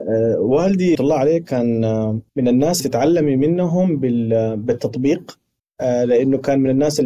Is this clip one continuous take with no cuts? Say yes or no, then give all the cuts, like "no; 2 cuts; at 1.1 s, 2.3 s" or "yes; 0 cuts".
no; 4 cuts; at 0.9 s, 2.3 s, 2.8 s, 5.6 s